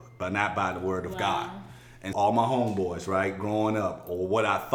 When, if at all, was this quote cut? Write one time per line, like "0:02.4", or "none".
0:02.1